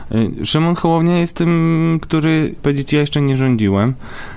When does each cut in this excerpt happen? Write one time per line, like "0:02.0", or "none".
0:02.0
0:02.6